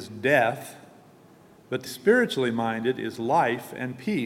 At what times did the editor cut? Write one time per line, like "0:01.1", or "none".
0:01.9